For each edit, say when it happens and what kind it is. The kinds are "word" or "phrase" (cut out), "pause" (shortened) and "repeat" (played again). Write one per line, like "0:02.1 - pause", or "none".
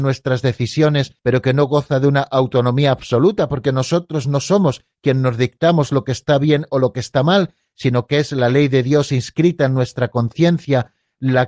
0:01.2 - pause